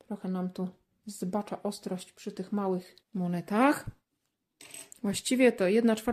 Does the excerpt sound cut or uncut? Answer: cut